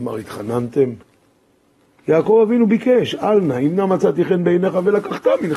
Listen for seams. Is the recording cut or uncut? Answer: uncut